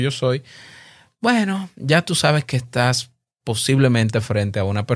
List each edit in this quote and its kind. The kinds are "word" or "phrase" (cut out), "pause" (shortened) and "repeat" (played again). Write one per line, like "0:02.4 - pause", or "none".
none